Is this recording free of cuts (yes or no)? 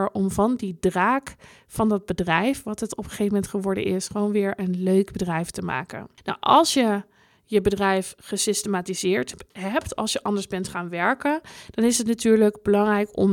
yes